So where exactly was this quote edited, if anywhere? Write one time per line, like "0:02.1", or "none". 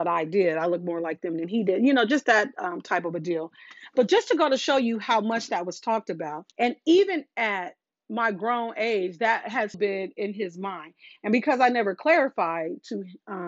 0:06.5
0:09.7